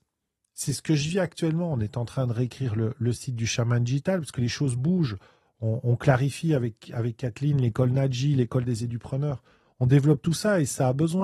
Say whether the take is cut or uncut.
uncut